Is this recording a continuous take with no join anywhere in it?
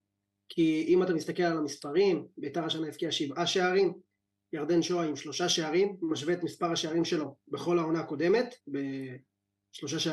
no; 1 cut; at 8.6 s

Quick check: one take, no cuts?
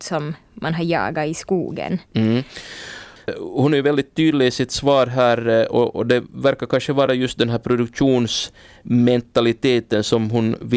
yes; 0 cuts

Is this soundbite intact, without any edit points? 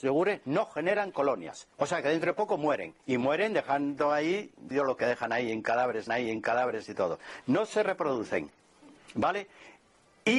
no; 4 cuts; at 1.7 s, 3.0 s, 4.7 s, 6.1 s

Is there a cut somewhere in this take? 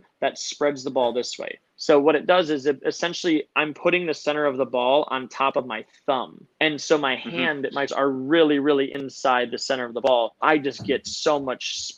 yes; 4 cuts; at 1.7 s, 6.5 s, 7.9 s, 10.4 s

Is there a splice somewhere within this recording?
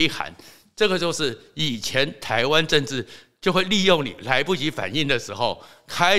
no; 0 cuts

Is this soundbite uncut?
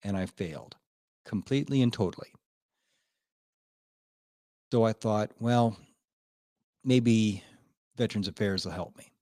yes; 0 cuts

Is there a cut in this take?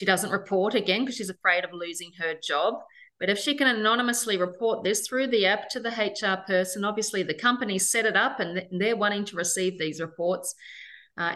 no; 0 cuts

